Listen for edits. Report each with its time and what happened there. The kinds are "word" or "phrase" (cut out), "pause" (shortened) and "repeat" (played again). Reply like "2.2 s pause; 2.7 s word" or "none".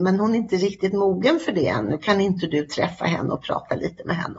none

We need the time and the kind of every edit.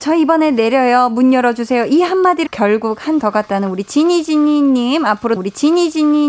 2.5 s word; 3.2 s word; 5.4 s repeat

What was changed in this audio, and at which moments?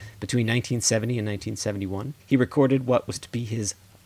2.2 s pause

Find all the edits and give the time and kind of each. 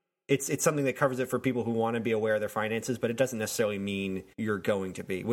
4.3 s pause

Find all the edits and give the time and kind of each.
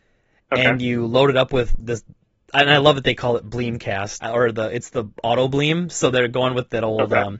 1.8 s word; 4.2 s word

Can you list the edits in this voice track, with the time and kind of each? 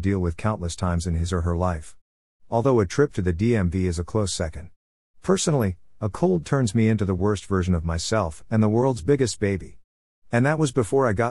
none

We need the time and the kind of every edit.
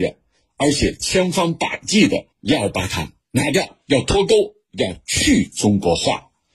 2.3 s pause; 3.2 s pause; 3.8 s pause

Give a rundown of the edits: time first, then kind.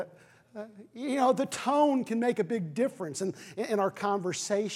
none

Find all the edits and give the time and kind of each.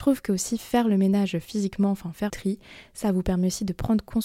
2.3 s word

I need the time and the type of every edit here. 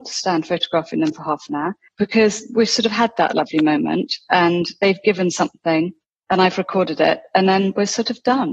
1.9 s pause; 6.0 s pause

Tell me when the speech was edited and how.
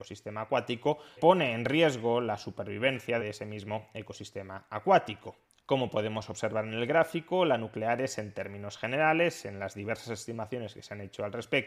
1.2 s word; 3.2 s phrase

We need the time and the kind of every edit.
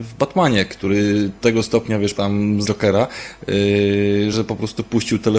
1.4 s word; 2.1 s word; 2.6 s word; 4.3 s word

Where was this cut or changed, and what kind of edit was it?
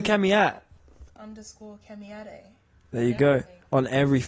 none

